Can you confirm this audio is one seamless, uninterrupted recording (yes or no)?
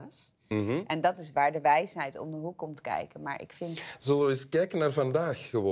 yes